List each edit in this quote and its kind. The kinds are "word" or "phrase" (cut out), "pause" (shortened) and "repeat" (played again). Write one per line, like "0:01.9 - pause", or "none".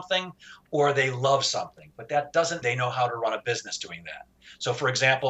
0:02.6 - word